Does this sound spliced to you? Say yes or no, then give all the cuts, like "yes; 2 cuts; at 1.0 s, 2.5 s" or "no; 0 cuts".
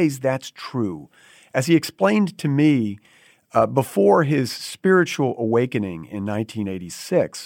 no; 0 cuts